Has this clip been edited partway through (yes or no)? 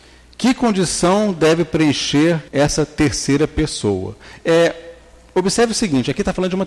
yes